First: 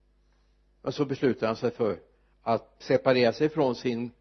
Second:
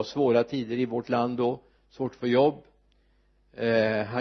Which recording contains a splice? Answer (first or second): first